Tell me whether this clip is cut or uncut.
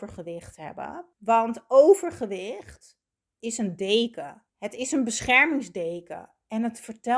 cut